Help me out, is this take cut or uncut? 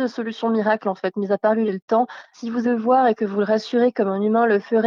cut